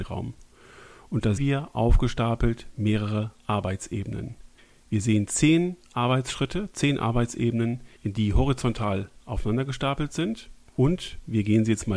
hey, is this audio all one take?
no; 3 cuts; at 1.4 s, 4.6 s, 8.0 s

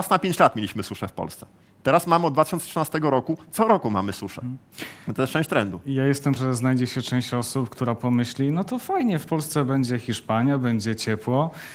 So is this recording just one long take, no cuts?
no; 1 cut; at 6.4 s

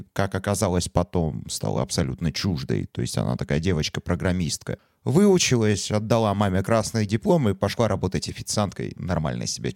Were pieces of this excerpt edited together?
no; 0 cuts

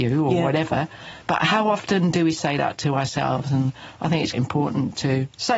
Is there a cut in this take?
yes; 2 cuts; at 1.2 s, 4.3 s

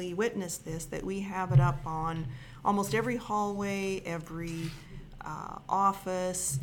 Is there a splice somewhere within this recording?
no; 0 cuts

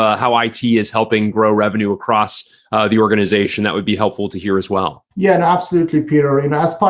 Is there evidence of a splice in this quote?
yes; 1 cut; at 5.1 s

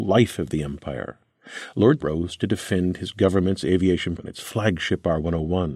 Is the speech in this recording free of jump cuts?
no; 2 cuts; at 2.0 s, 4.2 s

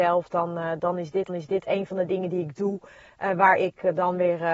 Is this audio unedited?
no; 1 cut; at 1.3 s

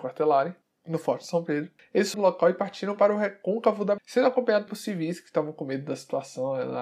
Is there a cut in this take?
yes; 3 cuts; at 2.1 s, 4.0 s, 4.7 s

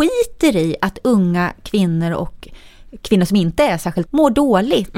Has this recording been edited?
yes; 1 cut; at 4.0 s

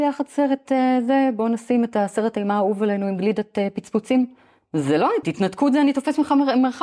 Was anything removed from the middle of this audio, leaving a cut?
yes; 1 cut; at 5.2 s

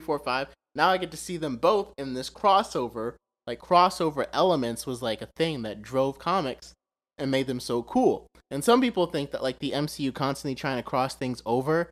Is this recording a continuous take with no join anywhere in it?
yes; 0 cuts

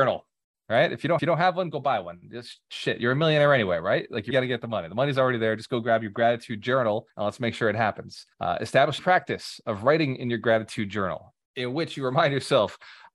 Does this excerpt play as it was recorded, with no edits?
no; 6 cuts; at 1.2 s, 4.3 s, 7.1 s, 8.3 s, 9.0 s, 11.5 s

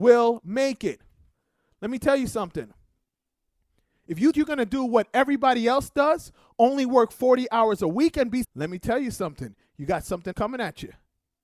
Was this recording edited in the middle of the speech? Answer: yes; 3 cuts; at 4.3 s, 8.4 s, 10.3 s

